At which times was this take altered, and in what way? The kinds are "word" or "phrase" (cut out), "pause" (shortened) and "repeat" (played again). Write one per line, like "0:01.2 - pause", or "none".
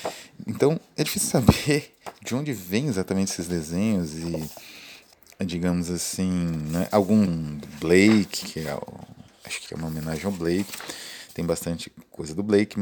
0:05.1 - pause
0:07.3 - word
0:08.4 - word
0:09.7 - phrase